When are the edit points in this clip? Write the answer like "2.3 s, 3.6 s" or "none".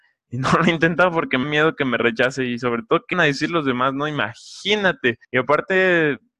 1.4 s, 3.1 s, 5.2 s